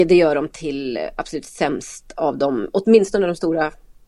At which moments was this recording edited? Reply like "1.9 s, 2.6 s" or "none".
none